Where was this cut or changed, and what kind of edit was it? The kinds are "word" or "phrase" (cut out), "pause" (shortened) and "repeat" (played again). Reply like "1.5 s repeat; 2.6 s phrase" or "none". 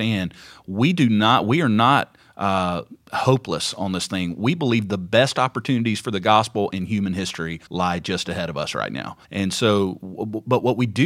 7.7 s pause; 9.2 s pause